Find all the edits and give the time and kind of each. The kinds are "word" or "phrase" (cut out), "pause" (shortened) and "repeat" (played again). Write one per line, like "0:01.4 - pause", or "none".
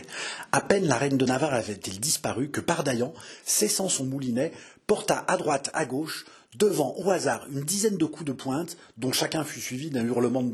none